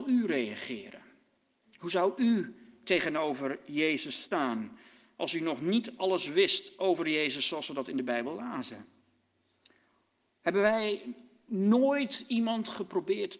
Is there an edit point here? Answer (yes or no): no